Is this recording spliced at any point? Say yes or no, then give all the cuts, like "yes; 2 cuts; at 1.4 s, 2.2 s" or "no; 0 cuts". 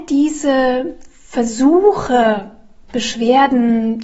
no; 0 cuts